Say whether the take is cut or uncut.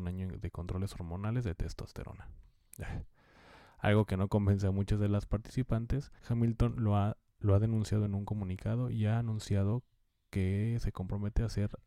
cut